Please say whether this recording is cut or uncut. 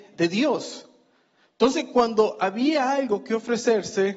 uncut